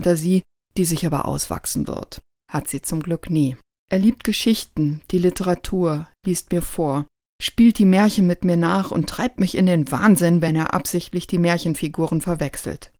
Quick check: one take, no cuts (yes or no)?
yes